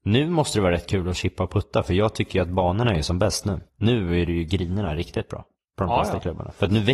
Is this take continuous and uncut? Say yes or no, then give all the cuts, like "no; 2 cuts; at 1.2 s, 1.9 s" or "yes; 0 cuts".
no; 2 cuts; at 3.7 s, 5.6 s